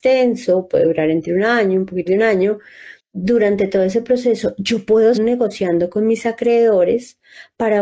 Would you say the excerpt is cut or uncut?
cut